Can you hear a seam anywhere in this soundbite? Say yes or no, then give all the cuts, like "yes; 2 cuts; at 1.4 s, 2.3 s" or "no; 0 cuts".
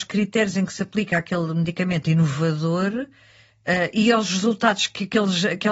no; 0 cuts